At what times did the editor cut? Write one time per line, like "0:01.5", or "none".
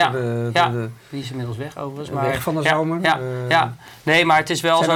none